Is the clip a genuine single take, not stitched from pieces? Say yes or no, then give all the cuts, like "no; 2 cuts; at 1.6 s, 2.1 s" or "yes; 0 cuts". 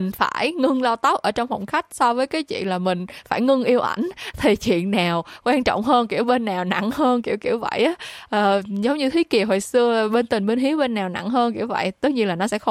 yes; 0 cuts